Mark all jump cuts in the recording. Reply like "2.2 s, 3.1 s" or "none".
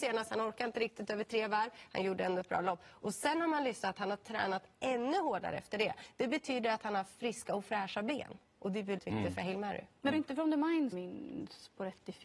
9.0 s, 10.1 s, 10.9 s